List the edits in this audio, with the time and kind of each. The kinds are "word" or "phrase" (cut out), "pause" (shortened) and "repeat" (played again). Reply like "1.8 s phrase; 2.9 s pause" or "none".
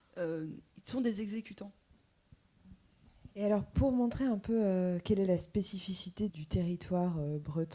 3.3 s pause; 6.3 s word